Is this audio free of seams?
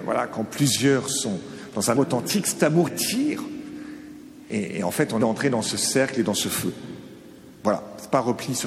no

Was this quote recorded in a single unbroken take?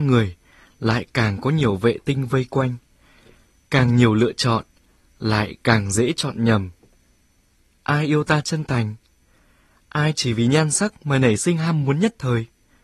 yes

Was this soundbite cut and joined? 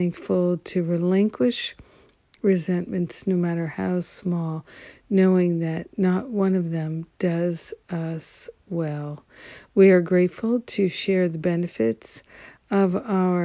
yes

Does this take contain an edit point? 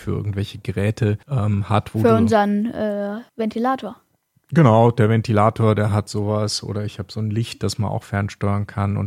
yes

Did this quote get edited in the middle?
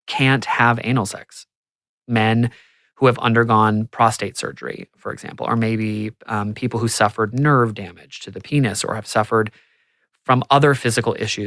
no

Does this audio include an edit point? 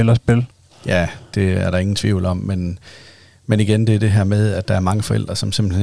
no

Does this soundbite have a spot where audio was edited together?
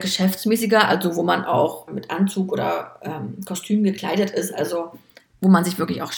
yes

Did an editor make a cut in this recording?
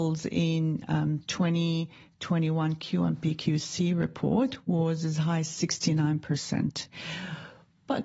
no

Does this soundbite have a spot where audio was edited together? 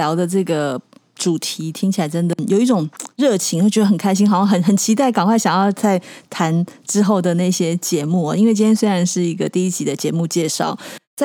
yes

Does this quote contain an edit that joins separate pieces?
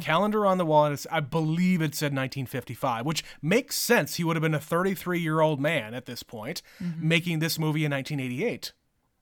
no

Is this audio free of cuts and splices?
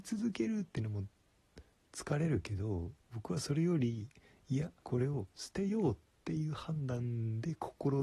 no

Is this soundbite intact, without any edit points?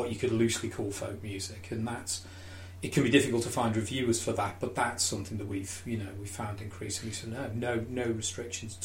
yes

